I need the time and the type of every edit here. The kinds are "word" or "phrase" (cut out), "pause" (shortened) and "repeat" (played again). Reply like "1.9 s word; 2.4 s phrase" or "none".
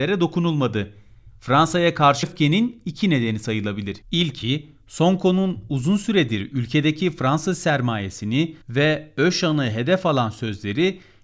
2.2 s phrase; 4.0 s pause; 8.6 s pause